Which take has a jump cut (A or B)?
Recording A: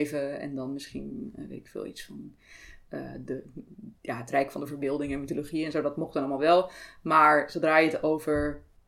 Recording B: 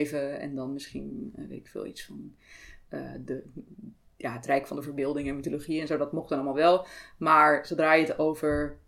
A